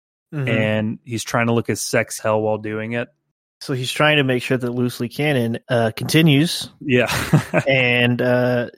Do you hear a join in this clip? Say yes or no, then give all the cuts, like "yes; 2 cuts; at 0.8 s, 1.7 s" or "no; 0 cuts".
yes; 2 cuts; at 2.2 s, 5.6 s